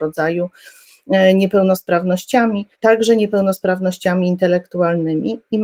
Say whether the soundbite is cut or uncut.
cut